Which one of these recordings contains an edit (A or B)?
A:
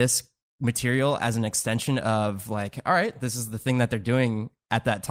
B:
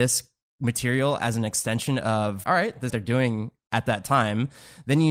B